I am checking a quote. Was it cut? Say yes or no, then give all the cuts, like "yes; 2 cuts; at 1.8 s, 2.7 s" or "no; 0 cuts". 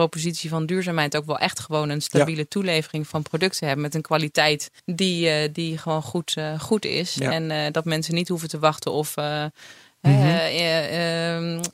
yes; 1 cut; at 4.8 s